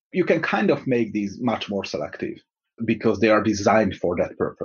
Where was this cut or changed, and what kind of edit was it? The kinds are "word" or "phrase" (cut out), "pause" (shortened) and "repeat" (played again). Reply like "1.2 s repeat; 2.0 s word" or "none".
none